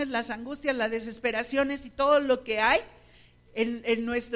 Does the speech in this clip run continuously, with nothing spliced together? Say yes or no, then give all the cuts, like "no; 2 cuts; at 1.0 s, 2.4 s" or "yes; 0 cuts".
yes; 0 cuts